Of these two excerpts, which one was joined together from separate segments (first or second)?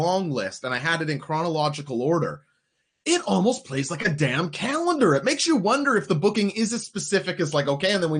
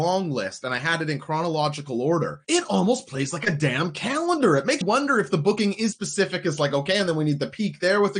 second